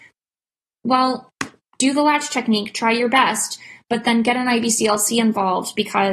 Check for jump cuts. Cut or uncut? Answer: cut